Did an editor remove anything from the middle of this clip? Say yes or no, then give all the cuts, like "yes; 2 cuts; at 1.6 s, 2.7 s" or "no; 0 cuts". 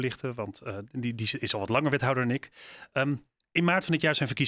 no; 0 cuts